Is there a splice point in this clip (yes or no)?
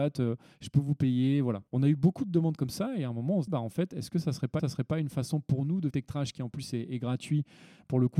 yes